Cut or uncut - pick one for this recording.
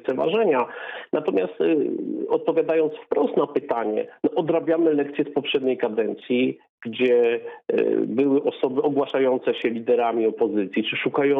uncut